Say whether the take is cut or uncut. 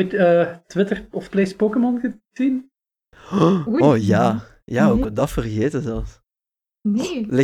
cut